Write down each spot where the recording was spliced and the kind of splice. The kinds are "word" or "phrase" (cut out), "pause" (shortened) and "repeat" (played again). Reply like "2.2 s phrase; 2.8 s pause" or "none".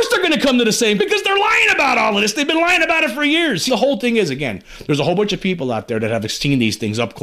1.0 s word; 3.7 s word